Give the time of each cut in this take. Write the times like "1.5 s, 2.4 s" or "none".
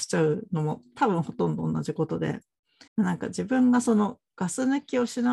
2.9 s

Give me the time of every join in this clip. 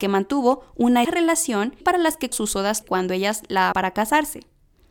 1.0 s, 1.8 s, 2.3 s, 2.8 s, 3.7 s

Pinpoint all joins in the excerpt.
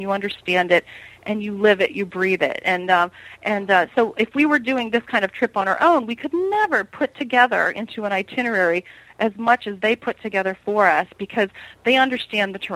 none

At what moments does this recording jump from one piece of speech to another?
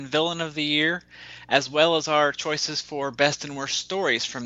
none

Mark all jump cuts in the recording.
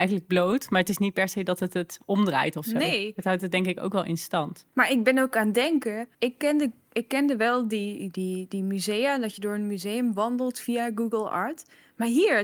4.7 s, 6.1 s

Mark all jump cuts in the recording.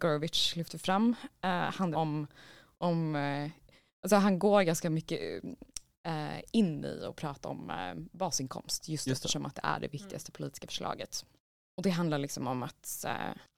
1.9 s

